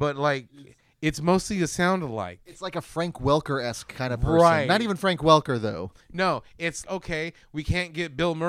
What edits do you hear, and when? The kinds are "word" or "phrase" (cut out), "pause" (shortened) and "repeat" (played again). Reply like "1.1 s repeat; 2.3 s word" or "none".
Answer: 6.8 s word